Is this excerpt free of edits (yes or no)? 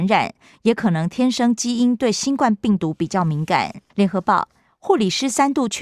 no